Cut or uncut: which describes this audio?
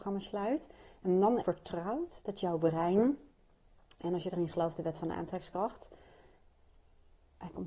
cut